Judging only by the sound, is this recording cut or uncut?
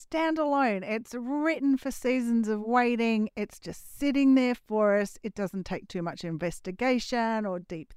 uncut